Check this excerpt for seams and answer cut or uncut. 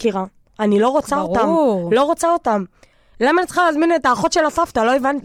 uncut